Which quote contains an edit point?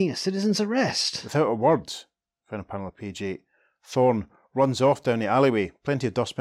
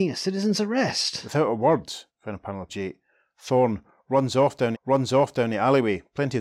second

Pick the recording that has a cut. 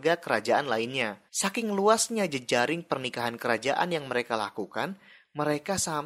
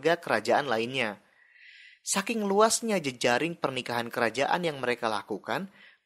first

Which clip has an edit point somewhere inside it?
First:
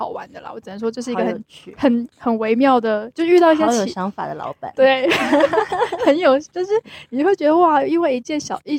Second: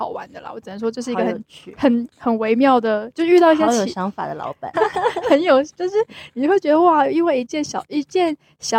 second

